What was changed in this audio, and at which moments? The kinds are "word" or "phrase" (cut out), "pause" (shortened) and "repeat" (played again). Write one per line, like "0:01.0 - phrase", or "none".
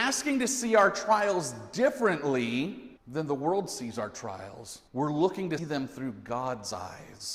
0:03.0 - pause
0:04.9 - pause
0:05.6 - word